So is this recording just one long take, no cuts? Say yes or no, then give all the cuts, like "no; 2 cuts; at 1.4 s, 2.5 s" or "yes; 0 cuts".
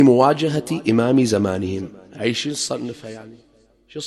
yes; 0 cuts